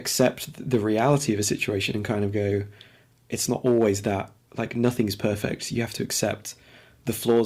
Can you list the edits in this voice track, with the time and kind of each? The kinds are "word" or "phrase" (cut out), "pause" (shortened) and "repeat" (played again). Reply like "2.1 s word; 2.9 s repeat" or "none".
none

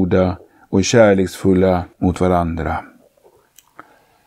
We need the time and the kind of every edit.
1.9 s pause

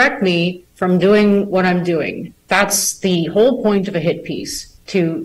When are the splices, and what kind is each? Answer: 2.4 s pause

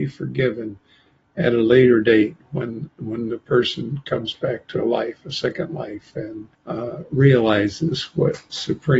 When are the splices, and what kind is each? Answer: 6.6 s pause

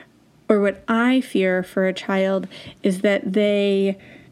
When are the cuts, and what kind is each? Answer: none

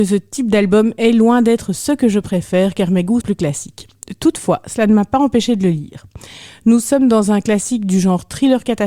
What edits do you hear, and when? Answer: 3.2 s word

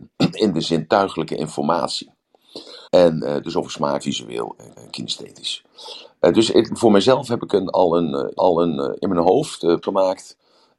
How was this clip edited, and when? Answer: 2.9 s pause; 4.0 s phrase; 4.7 s repeat; 6.7 s phrase; 8.4 s repeat; 9.8 s word

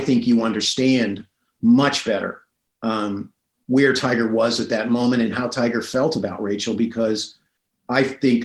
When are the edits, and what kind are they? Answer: none

